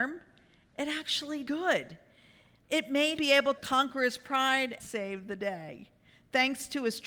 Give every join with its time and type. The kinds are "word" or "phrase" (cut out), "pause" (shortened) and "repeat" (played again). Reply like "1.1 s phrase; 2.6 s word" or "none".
1.5 s word; 3.2 s word; 3.6 s word; 4.8 s word